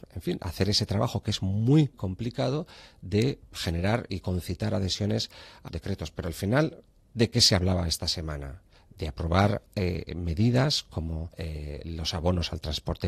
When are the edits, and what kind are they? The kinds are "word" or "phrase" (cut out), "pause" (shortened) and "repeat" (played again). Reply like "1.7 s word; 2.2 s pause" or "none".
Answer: 1.9 s word; 5.7 s word; 7.0 s pause; 8.8 s pause; 9.7 s pause; 11.3 s pause

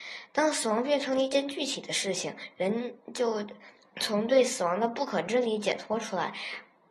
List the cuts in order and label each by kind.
3.8 s pause

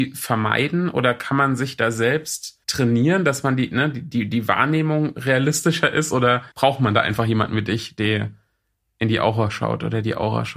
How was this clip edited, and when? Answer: 2.6 s pause; 6.5 s pause

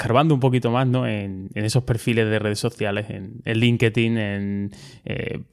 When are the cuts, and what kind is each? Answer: none

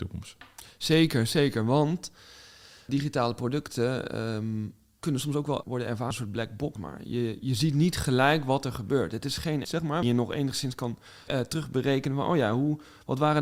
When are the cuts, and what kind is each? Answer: 2.9 s word; 5.0 s word; 5.6 s word; 6.1 s word; 6.8 s word; 9.6 s word; 10.0 s word; 11.3 s word

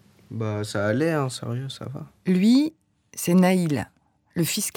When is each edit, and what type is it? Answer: none

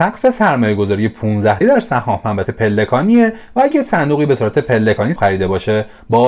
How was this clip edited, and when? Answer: 1.6 s word; 2.4 s word; 5.2 s word

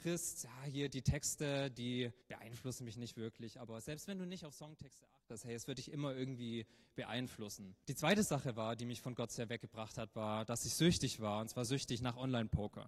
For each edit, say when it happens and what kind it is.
2.2 s pause; 7.8 s pause

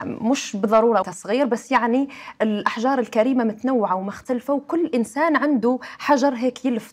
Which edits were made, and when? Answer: 1.0 s word

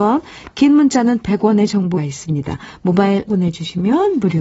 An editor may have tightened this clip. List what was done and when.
2.0 s word; 3.3 s phrase

